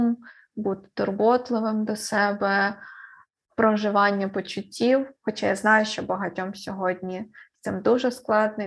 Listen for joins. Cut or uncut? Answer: uncut